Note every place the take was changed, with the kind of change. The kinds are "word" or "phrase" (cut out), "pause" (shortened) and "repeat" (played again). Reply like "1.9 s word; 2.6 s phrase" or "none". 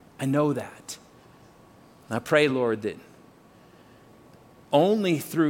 none